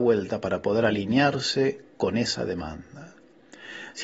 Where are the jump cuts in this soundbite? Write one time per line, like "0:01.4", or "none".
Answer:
none